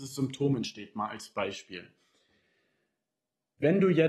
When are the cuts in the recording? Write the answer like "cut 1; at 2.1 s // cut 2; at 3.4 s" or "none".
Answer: none